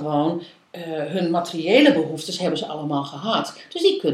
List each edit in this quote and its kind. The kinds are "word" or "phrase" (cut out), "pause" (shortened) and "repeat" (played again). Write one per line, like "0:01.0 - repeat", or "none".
none